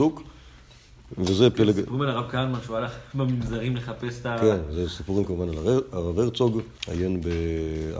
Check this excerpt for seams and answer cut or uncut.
cut